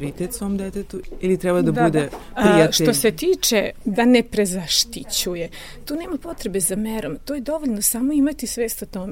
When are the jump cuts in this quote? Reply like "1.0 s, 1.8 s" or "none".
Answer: none

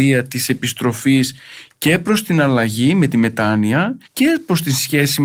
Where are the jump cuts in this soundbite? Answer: 4.0 s

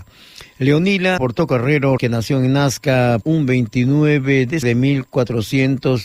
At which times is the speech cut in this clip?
1.2 s, 2.0 s, 3.2 s, 4.6 s

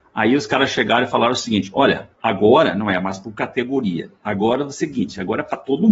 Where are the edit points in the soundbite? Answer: 2.1 s

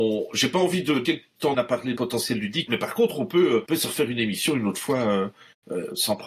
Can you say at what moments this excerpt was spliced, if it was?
1.0 s, 1.5 s, 2.0 s, 2.7 s, 3.7 s

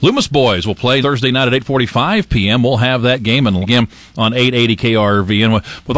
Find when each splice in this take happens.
1.0 s, 3.6 s

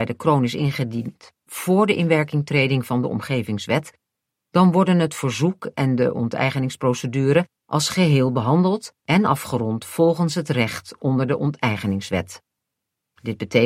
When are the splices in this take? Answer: 7.6 s, 9.0 s

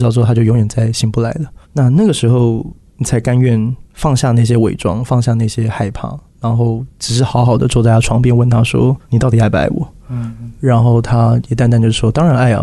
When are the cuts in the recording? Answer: 1.6 s, 3.9 s, 9.0 s, 10.0 s

